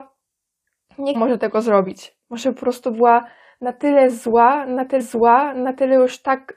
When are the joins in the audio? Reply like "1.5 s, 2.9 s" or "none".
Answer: 1.1 s, 5.0 s

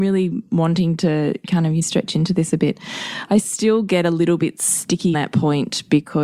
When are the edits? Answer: 1.8 s, 5.1 s

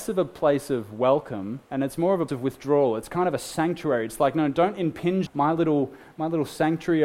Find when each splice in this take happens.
1.6 s, 2.3 s, 5.3 s

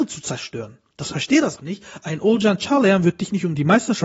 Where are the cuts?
1.1 s, 1.6 s

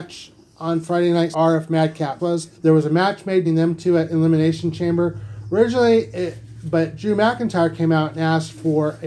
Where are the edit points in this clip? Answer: 1.3 s, 2.2 s, 2.5 s, 3.4 s

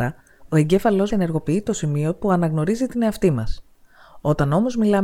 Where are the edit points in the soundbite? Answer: 1.1 s

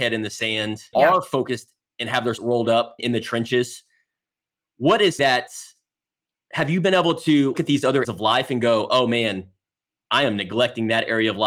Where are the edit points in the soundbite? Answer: 0.9 s, 2.4 s, 3.0 s, 5.2 s, 7.5 s, 8.0 s

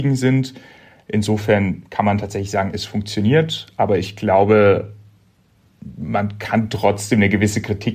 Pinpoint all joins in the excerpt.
none

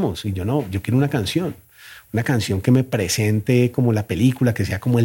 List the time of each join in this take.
none

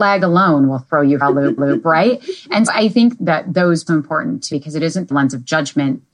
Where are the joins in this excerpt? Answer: 1.2 s, 1.6 s, 2.7 s, 3.2 s, 3.9 s, 4.5 s, 5.1 s

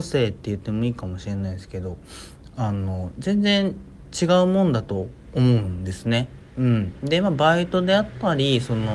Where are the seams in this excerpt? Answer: none

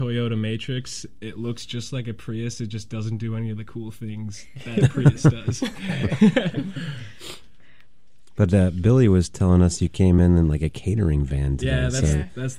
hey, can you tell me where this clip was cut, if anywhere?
none

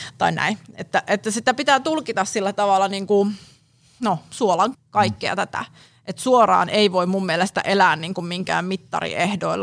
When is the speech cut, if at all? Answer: 4.7 s

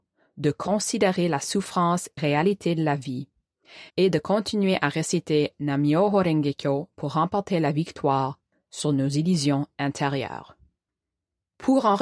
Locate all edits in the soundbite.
2.2 s, 3.9 s

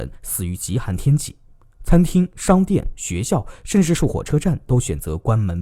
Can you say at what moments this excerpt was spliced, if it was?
none

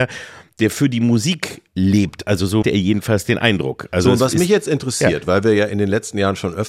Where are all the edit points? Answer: 1.7 s, 2.6 s

